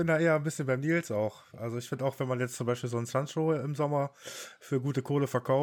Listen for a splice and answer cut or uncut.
uncut